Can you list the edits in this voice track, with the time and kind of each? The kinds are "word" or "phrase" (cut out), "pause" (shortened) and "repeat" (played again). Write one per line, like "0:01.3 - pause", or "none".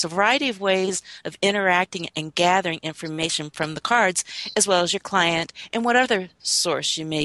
none

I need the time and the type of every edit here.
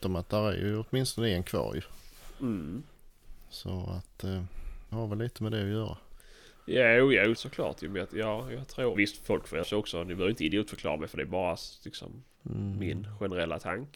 0:04.9 - word
0:07.3 - word
0:08.9 - word
0:09.6 - word

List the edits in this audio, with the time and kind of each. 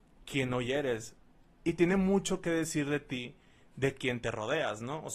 none

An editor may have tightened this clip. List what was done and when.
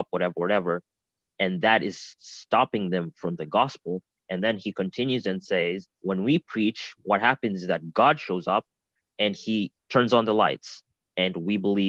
0:03.4 - phrase
0:05.9 - word
0:09.8 - pause

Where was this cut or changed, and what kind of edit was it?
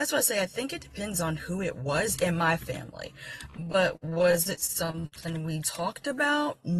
0:05.6 - word

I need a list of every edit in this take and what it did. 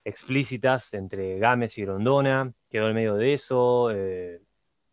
0:02.6 - pause

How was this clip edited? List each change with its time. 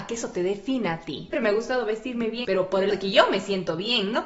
0:01.3 - phrase
0:02.4 - word
0:02.9 - word

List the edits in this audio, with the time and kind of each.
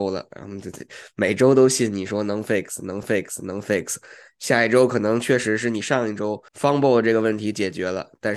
0:03.0 - repeat
0:06.5 - pause

